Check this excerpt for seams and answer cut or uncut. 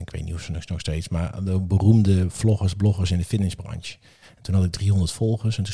uncut